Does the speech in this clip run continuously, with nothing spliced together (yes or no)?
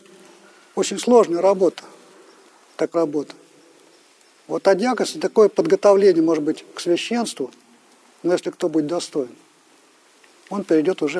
no